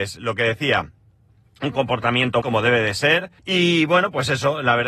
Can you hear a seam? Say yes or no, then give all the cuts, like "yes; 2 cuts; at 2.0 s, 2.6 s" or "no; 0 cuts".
yes; 2 cuts; at 2.4 s, 3.4 s